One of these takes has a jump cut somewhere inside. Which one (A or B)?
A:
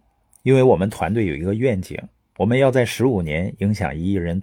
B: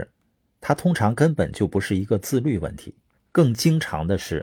B